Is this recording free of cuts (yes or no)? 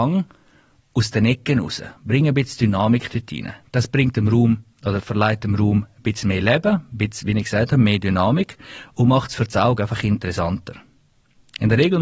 yes